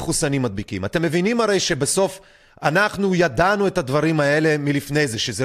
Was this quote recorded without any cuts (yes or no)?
yes